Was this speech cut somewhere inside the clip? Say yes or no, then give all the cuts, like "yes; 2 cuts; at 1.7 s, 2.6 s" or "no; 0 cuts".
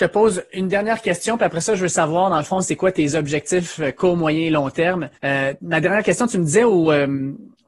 yes; 1 cut; at 5.1 s